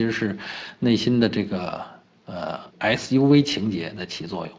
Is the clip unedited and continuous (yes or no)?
no